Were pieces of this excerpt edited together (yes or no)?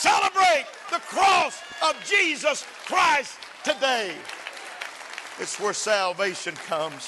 no